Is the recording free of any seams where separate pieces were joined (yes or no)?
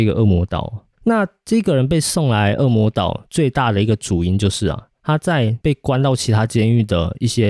no